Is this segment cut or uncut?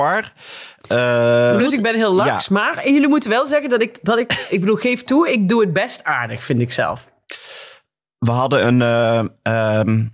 uncut